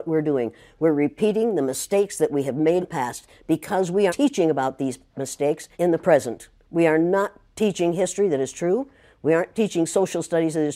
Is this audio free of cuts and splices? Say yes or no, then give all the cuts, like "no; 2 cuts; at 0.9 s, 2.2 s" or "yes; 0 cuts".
no; 3 cuts; at 2.8 s, 4.1 s, 5.7 s